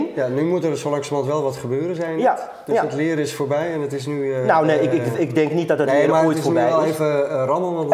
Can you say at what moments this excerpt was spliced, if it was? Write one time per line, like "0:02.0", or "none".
none